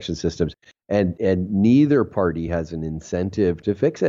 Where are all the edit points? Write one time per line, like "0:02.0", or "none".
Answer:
none